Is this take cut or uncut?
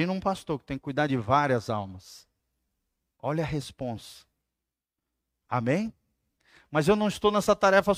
uncut